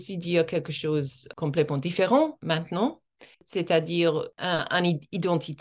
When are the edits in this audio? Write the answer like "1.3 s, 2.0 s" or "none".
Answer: 3.3 s

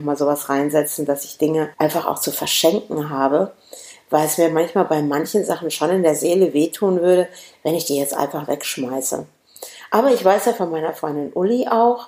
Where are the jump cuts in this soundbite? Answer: 1.7 s

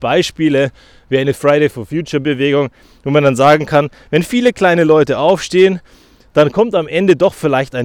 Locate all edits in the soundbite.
none

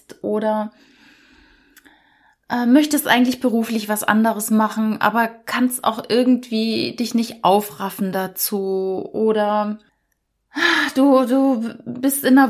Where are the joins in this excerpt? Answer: none

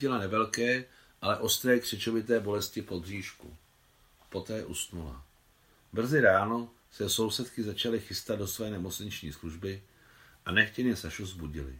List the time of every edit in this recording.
none

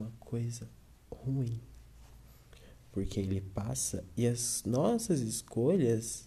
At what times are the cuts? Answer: none

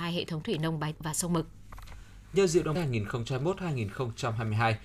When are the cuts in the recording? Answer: 0.9 s, 2.8 s

